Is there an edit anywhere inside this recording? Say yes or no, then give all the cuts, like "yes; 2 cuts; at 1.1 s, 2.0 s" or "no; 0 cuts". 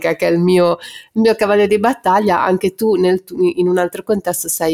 no; 0 cuts